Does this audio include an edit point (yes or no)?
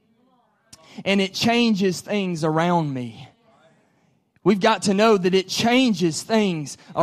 no